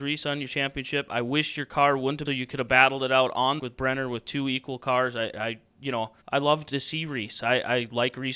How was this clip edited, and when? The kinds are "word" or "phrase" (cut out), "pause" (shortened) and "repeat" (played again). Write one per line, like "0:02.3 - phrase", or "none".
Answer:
0:02.3 - phrase
0:03.6 - phrase
0:05.3 - word
0:06.2 - pause